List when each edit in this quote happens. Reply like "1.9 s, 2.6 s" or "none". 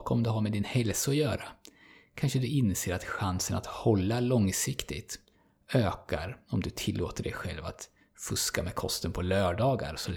none